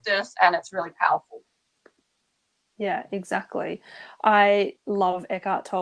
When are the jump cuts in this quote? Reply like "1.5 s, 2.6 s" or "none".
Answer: 2.0 s